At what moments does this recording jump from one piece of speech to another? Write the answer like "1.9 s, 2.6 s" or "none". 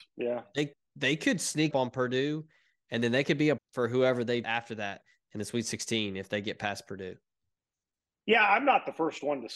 1.7 s, 3.6 s, 4.4 s